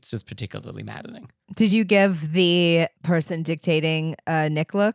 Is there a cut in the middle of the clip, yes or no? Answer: no